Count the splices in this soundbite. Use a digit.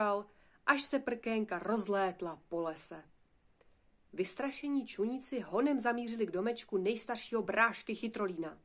0